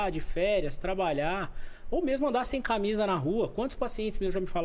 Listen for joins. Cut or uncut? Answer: uncut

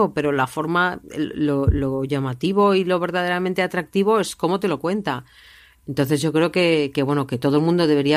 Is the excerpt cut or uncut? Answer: uncut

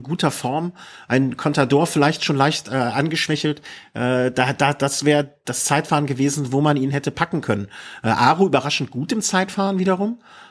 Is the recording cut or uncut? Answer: uncut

